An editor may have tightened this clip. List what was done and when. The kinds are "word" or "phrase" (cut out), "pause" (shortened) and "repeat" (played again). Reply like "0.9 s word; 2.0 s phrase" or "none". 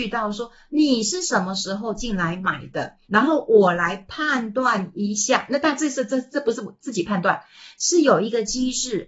3.0 s pause

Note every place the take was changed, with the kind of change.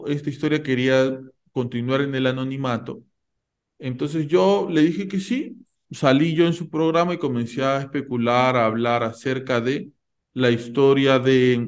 none

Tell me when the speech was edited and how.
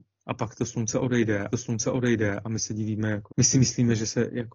1.5 s repeat; 3.3 s phrase

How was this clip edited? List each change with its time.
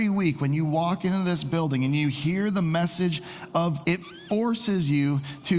3.8 s word

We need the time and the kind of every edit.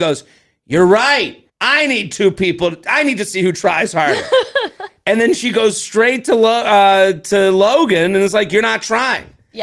1.5 s pause

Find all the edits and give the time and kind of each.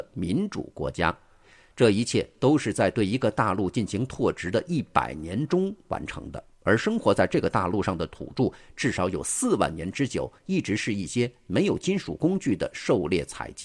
6.5 s pause

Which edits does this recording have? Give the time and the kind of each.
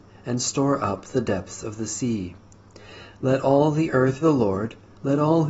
4.2 s word

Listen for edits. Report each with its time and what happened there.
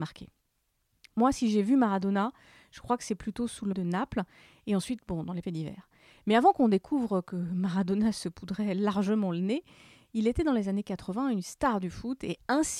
3.7 s word; 5.4 s word

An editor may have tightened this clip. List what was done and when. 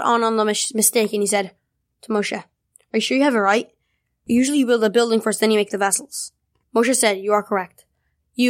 none

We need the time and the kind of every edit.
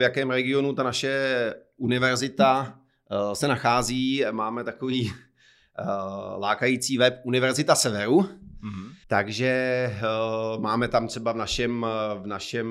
9.0 s pause

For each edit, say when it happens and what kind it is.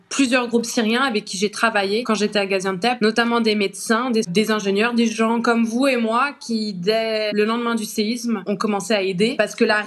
4.2 s word

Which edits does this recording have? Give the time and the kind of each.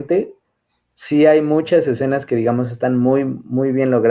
none

